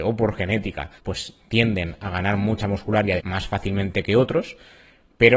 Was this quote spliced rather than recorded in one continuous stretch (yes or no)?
yes